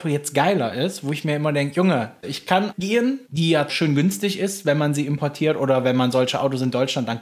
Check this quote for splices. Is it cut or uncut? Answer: cut